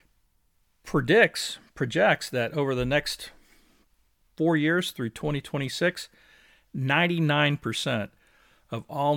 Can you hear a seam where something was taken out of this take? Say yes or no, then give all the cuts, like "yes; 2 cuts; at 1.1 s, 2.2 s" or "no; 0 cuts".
no; 0 cuts